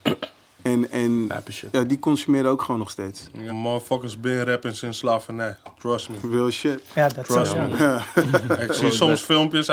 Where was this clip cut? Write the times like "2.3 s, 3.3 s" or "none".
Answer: 3.5 s